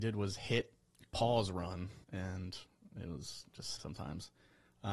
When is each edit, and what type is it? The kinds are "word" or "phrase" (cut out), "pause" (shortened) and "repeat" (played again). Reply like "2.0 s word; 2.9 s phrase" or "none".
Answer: 2.0 s pause; 3.8 s word